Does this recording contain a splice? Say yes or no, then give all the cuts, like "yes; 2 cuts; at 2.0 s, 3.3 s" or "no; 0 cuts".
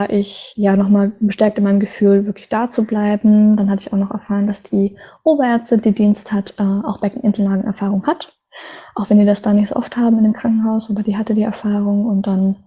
no; 0 cuts